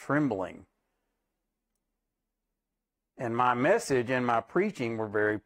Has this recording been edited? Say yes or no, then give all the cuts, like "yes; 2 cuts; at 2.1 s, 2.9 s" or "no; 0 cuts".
no; 0 cuts